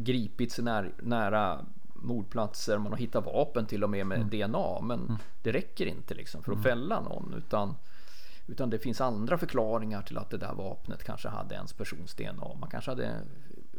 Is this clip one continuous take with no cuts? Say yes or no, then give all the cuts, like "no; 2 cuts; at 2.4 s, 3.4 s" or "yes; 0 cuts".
yes; 0 cuts